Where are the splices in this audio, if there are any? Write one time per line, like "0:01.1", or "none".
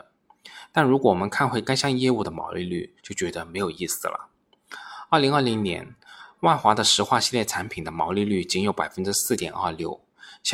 0:03.0